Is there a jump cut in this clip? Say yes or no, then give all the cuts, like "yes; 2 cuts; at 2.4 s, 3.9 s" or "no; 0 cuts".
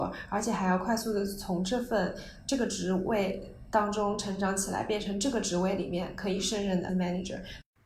yes; 1 cut; at 6.9 s